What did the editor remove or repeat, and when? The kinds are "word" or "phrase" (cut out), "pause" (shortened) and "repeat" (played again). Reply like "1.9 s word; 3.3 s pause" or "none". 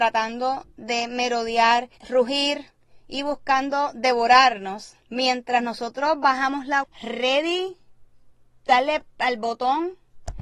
2.0 s pause; 5.0 s pause; 6.8 s phrase